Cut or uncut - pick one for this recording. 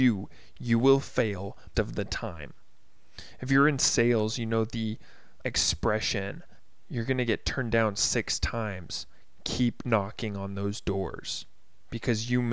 cut